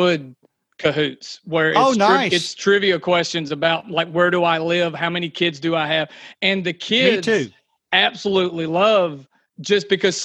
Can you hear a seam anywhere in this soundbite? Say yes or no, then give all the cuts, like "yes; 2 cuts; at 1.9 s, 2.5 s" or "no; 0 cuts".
no; 0 cuts